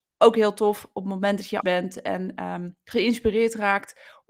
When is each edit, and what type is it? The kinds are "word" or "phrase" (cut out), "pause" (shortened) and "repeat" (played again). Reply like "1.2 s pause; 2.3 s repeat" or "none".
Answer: 1.6 s word